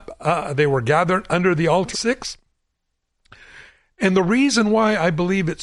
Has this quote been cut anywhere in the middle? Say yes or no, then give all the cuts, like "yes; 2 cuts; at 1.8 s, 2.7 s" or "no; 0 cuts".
yes; 1 cut; at 1.9 s